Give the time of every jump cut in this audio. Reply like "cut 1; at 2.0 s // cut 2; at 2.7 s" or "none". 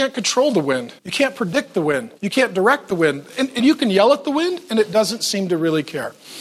cut 1; at 1.0 s // cut 2; at 2.2 s